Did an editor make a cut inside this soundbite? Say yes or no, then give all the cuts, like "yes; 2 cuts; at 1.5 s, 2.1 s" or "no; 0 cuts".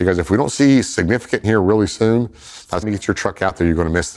yes; 2 cuts; at 1.4 s, 2.8 s